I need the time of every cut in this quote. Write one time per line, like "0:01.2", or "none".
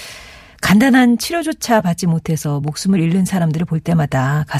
none